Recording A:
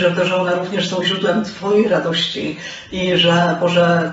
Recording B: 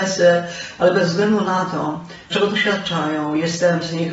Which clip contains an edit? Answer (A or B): B